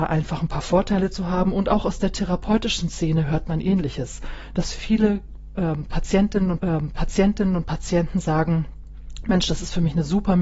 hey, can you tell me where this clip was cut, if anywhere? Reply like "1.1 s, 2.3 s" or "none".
6.6 s